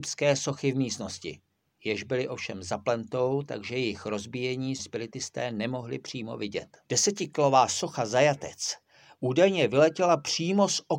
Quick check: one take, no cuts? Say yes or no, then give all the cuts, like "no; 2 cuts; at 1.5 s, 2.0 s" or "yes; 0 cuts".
no; 3 cuts; at 1.7 s, 4.8 s, 6.8 s